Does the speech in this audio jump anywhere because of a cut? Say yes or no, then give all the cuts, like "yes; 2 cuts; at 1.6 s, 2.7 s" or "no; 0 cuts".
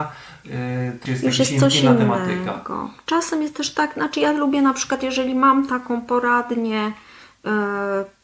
yes; 1 cut; at 1.1 s